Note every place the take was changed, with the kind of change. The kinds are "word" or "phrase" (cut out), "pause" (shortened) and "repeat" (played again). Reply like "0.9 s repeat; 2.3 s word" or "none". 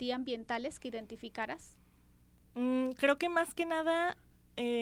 none